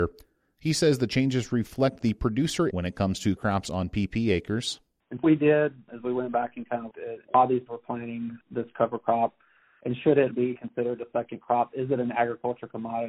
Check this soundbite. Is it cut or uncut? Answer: cut